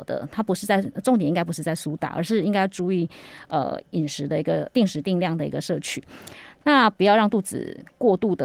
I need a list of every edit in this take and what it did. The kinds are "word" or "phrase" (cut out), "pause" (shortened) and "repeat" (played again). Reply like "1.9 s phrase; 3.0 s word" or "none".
4.7 s word